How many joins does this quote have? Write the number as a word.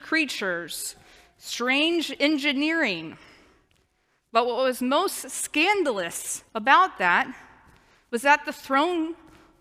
one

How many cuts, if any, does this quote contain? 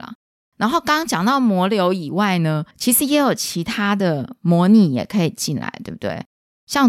one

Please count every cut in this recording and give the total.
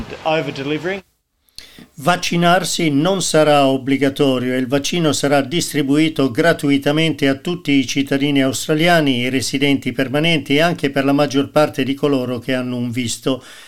zero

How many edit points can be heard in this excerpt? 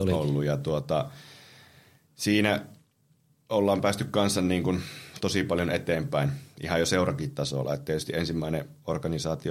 zero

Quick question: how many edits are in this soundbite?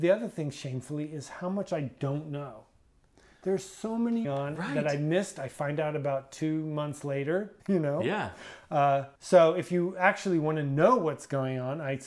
three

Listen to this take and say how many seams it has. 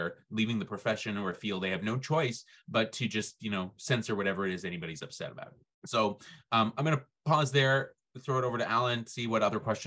one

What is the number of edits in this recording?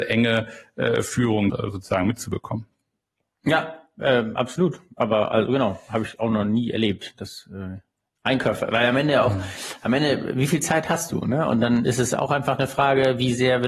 two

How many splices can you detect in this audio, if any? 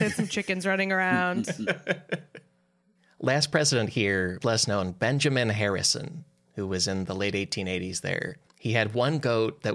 three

